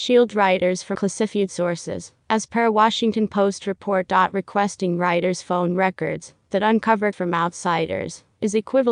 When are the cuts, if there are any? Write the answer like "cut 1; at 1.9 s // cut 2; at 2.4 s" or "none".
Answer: cut 1; at 0.9 s // cut 2; at 7.1 s